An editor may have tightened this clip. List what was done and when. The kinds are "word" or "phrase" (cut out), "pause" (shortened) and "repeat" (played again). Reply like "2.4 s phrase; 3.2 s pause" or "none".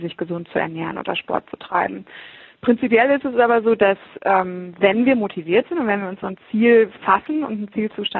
none